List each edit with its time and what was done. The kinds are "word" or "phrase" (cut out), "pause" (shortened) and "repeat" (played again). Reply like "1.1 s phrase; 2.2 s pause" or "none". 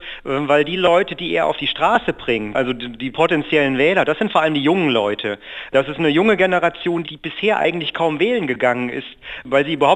3.1 s word; 7.0 s word